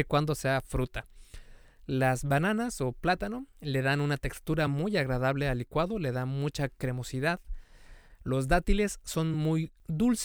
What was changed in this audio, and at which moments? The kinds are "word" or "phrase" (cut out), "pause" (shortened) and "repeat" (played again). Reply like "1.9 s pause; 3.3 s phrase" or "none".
none